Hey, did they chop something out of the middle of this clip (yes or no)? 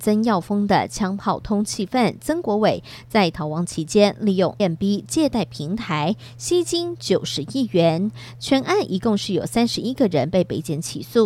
yes